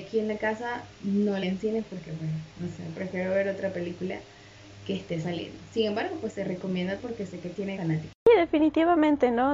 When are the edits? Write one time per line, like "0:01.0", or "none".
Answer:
0:01.4
0:02.5
0:07.0
0:07.8
0:08.2